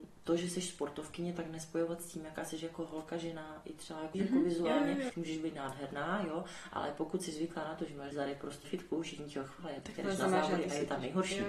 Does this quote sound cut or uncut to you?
cut